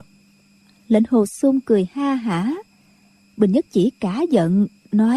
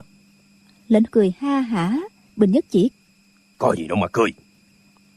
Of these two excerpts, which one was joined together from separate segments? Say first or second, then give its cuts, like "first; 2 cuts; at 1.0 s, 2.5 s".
second; 3 cuts; at 1.1 s, 2.3 s, 2.9 s